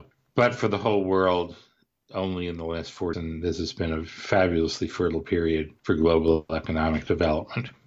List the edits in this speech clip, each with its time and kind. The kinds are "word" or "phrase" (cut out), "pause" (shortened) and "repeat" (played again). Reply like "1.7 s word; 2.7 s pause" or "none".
3.1 s word; 5.8 s pause